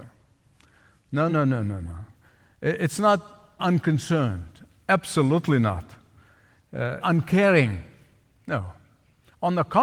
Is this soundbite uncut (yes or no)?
no